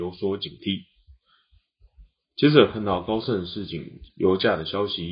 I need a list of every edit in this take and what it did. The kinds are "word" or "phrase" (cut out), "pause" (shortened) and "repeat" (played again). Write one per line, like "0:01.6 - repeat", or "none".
none